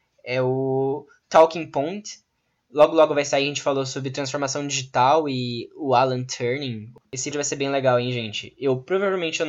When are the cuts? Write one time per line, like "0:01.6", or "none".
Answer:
0:07.3